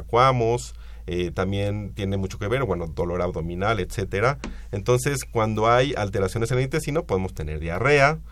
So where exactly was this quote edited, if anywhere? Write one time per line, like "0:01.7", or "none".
none